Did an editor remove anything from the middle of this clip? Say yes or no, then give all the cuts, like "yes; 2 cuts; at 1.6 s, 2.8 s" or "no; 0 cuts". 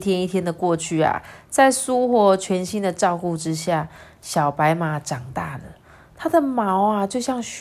no; 0 cuts